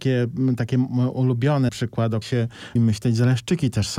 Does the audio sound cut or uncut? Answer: cut